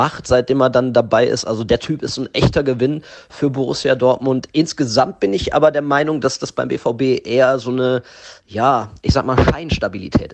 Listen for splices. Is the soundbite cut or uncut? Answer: uncut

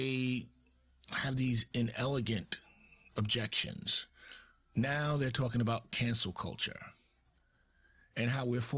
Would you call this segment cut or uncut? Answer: uncut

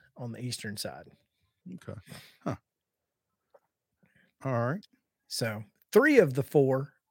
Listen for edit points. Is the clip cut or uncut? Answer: uncut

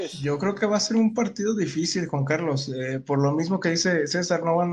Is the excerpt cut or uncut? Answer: uncut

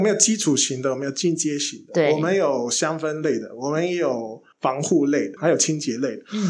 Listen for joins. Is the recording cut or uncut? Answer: cut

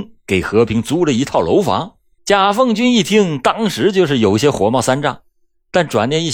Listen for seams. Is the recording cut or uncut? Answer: cut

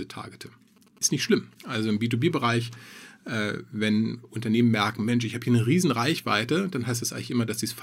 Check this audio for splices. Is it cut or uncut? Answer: uncut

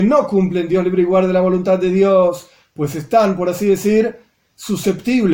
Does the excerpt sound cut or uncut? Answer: uncut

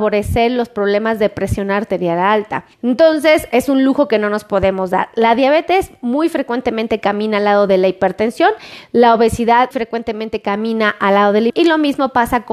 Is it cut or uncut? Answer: cut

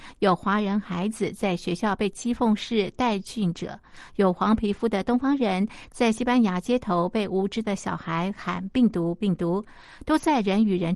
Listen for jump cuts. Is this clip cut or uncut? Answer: uncut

